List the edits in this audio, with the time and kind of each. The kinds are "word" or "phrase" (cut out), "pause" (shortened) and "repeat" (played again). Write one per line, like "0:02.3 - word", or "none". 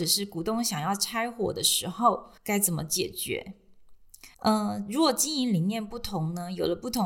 0:02.4 - pause
0:04.3 - pause